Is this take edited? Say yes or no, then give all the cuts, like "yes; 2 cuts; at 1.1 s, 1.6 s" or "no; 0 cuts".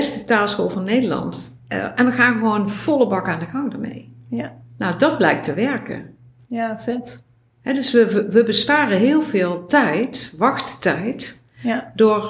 no; 0 cuts